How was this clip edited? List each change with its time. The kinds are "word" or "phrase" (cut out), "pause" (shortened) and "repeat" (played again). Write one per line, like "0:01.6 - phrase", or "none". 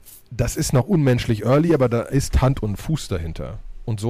none